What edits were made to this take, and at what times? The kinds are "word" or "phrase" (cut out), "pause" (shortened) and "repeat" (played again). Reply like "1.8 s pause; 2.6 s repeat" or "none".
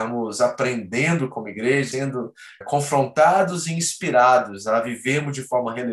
1.9 s word; 2.6 s word